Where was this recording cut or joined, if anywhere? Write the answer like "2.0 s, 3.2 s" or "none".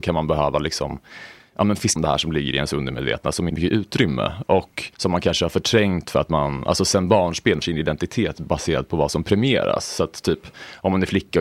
2.0 s, 3.5 s, 4.9 s, 7.6 s